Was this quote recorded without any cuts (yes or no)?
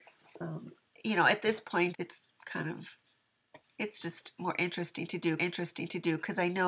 no